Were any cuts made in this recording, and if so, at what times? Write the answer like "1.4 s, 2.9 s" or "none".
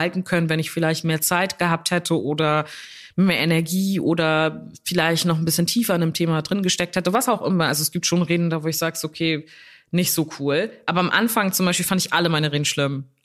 none